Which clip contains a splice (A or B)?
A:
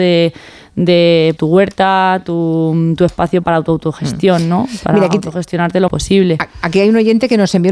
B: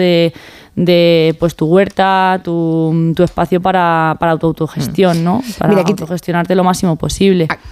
A